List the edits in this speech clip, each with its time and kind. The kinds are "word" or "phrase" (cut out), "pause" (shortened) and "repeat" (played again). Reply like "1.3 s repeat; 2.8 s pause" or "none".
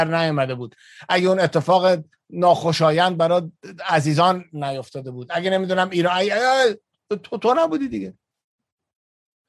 none